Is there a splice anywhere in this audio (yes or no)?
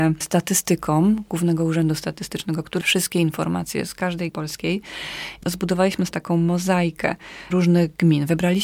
yes